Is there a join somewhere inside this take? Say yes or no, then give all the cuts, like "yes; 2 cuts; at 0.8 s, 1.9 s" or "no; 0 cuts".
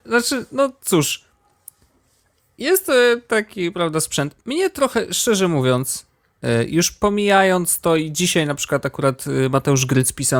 no; 0 cuts